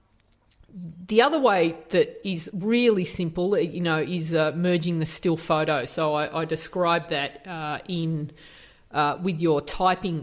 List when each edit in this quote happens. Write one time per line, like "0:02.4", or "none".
none